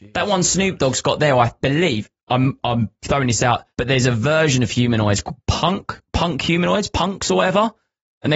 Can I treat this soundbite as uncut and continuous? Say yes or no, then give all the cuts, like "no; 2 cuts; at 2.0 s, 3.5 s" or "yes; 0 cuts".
no; 1 cut; at 3.7 s